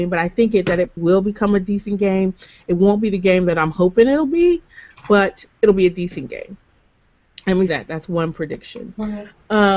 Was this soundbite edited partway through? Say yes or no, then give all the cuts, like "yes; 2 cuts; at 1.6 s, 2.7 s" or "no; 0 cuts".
yes; 3 cuts; at 1.0 s, 5.5 s, 7.7 s